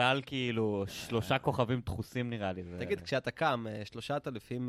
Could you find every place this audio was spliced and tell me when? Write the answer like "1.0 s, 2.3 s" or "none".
none